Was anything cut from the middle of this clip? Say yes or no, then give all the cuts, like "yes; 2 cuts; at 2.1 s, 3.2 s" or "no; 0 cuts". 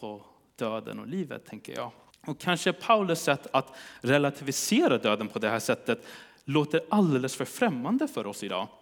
yes; 1 cut; at 2.1 s